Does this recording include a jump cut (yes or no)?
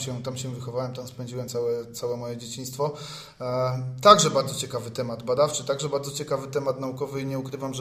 no